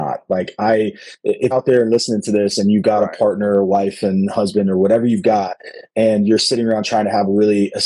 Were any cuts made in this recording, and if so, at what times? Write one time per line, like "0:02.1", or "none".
0:01.5